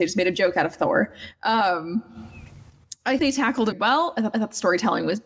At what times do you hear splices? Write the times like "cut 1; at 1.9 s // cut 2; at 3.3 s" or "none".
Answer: cut 1; at 3.2 s // cut 2; at 3.7 s // cut 3; at 4.3 s